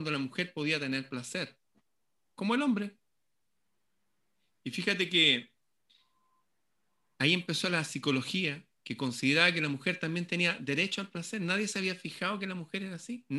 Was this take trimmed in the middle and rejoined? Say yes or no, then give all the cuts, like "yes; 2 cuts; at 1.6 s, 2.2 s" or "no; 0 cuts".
no; 0 cuts